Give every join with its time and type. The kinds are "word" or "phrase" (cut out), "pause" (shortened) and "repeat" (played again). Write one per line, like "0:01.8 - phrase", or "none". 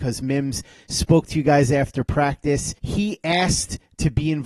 0:02.8 - pause